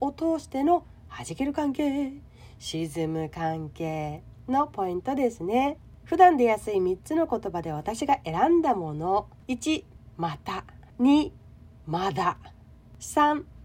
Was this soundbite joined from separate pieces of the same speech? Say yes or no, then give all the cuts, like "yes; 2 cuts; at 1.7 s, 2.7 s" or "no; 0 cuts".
yes; 1 cut; at 10.9 s